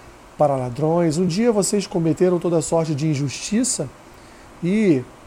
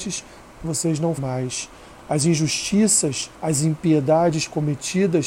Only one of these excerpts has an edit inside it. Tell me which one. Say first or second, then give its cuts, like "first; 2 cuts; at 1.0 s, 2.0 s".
second; 2 cuts; at 1.2 s, 3.3 s